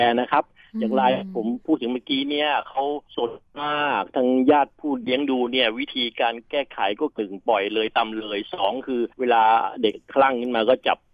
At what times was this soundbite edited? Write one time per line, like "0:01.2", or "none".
0:03.1
0:07.1
0:09.1